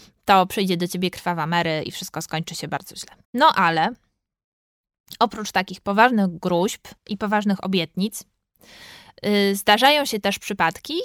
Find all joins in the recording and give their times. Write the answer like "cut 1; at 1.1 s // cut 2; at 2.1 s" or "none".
cut 1; at 3.2 s // cut 2; at 7.0 s